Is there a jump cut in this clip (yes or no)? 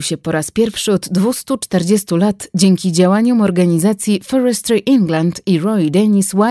no